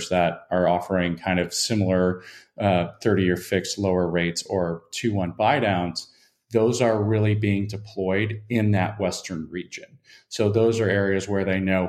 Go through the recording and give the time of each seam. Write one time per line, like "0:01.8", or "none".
none